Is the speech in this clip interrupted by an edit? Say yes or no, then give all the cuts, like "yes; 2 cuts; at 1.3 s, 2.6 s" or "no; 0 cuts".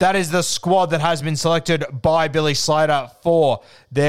no; 0 cuts